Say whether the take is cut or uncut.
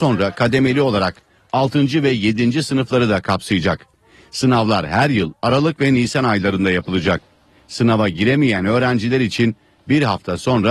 uncut